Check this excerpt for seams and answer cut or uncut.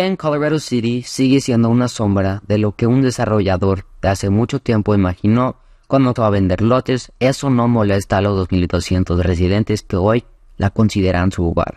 cut